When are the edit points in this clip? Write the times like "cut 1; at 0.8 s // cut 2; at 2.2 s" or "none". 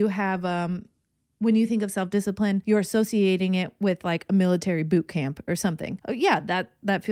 cut 1; at 1.2 s